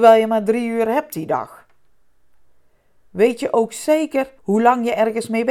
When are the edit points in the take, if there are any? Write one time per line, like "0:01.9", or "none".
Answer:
0:04.4

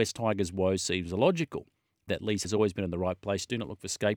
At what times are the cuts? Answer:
0:02.1
0:02.4

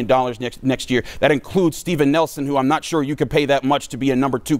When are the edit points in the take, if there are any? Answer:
none

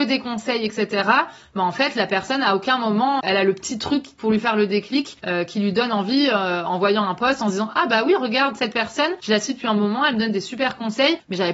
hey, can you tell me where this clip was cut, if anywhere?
0:03.2

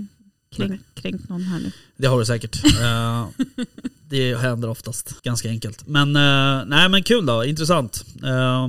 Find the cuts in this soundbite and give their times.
0:05.2

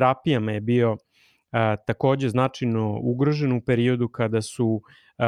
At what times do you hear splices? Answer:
none

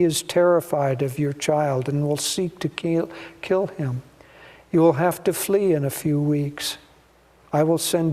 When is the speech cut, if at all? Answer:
none

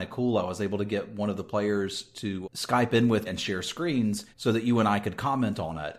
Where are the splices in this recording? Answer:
0:02.4
0:03.2
0:04.3

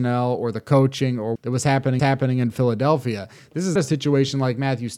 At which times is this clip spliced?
0:01.4
0:02.0
0:03.8

